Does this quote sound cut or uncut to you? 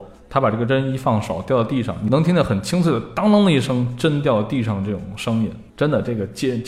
cut